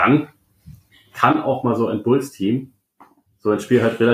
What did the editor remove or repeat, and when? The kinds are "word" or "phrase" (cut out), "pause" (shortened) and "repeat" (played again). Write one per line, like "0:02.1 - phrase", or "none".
none